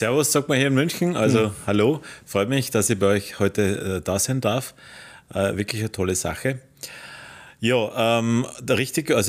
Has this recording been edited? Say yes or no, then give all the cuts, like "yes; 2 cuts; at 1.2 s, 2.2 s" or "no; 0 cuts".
no; 0 cuts